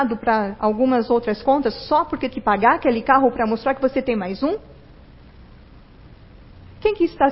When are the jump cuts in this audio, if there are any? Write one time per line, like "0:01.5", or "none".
0:02.3